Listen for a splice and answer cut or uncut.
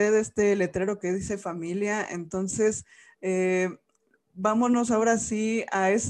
uncut